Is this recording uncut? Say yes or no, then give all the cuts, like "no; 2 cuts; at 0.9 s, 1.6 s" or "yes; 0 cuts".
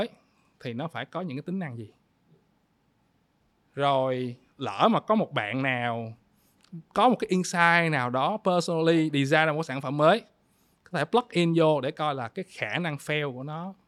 yes; 0 cuts